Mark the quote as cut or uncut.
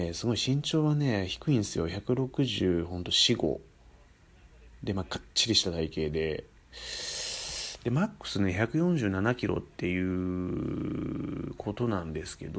cut